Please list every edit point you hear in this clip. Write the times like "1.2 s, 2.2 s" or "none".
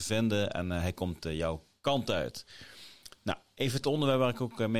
3.8 s